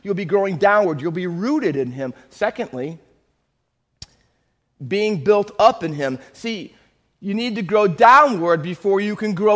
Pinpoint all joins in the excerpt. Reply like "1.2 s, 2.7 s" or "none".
none